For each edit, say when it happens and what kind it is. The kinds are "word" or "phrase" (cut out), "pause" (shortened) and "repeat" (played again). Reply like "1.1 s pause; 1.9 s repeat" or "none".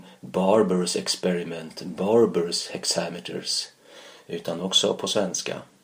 none